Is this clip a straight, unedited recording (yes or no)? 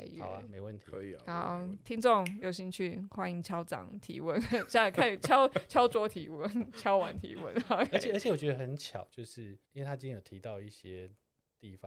no